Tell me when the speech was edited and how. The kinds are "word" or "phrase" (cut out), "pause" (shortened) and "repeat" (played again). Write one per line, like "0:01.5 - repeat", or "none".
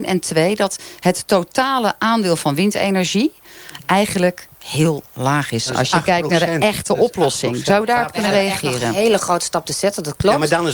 none